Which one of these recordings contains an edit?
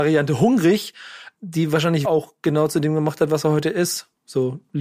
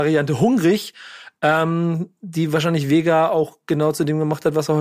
first; 2 cuts; at 1.4 s, 2.0 s

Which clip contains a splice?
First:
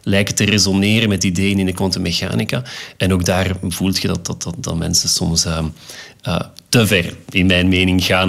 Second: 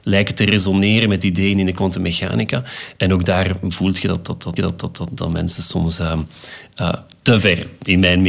second; 1 cut; at 4.6 s

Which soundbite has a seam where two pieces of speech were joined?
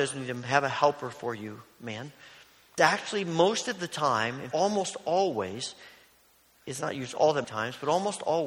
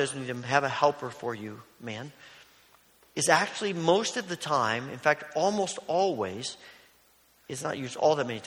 first; 3 cuts; at 2.8 s, 4.5 s, 7.4 s

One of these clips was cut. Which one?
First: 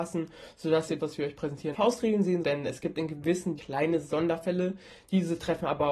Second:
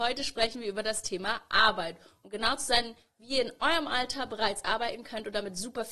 first; 4 cuts; at 1.0 s, 1.7 s, 2.4 s, 3.6 s

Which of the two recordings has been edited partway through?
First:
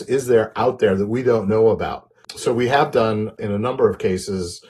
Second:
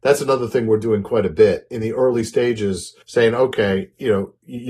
second; 1 cut; at 3.0 s

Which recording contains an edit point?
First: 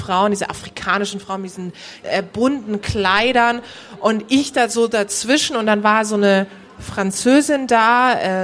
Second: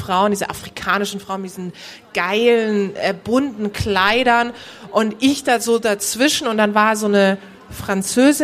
first; 1 cut; at 2.0 s

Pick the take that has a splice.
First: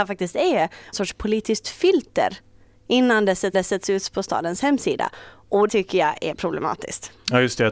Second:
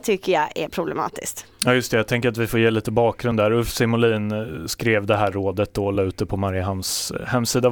first; 3 cuts; at 0.9 s, 3.5 s, 5.7 s

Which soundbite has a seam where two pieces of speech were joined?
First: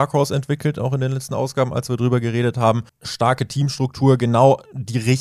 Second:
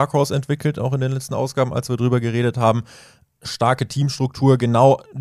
first; 1 cut; at 2.9 s

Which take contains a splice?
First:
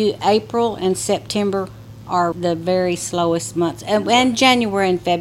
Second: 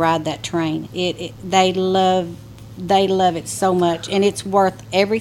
first; 1 cut; at 2.3 s

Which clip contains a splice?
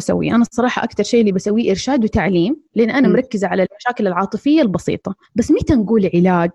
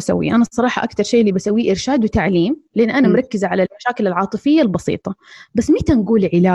first; 1 cut; at 5.2 s

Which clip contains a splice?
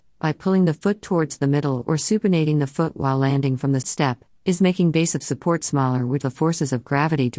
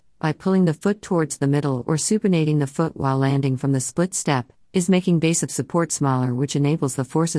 first; 2 cuts; at 3.8 s, 6.2 s

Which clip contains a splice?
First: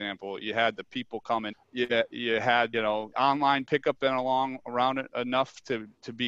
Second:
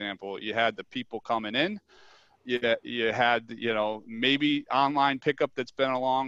first; 5 cuts; at 1.5 s, 2.7 s, 3.1 s, 4.0 s, 5.1 s

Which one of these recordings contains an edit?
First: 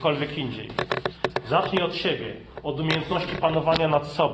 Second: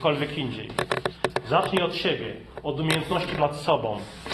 second; 1 cut; at 3.4 s

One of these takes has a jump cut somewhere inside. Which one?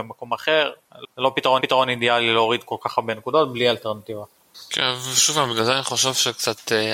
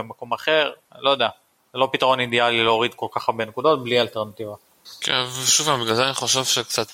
first; 2 cuts; at 1.0 s, 1.6 s

